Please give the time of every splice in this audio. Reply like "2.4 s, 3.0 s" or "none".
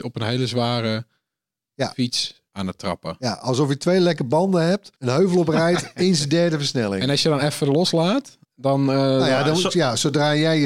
2.5 s, 5.0 s, 8.4 s